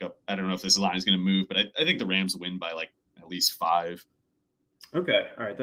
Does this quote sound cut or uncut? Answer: uncut